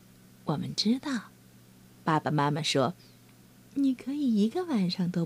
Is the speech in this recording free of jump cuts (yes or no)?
yes